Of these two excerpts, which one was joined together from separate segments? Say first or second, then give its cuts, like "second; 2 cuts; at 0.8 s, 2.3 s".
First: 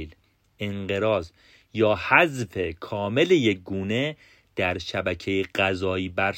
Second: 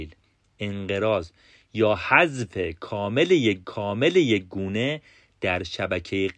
second; 1 cut; at 3.6 s